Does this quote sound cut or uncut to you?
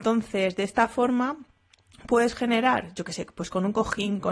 uncut